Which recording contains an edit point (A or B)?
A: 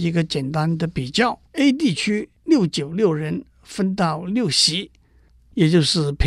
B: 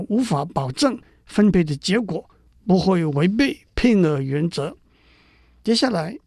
A